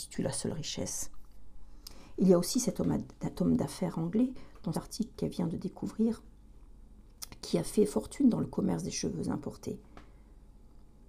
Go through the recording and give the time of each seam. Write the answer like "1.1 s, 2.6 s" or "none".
3.3 s, 4.7 s